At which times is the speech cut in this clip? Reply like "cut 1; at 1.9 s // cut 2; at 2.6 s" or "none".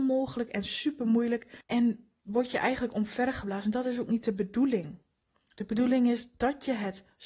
cut 1; at 1.6 s